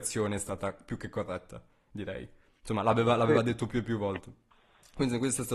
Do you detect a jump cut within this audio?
no; 0 cuts

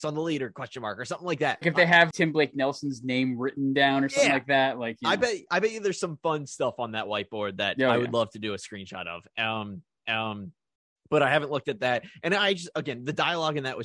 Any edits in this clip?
yes; 3 cuts; at 1.6 s, 2.1 s, 10.1 s

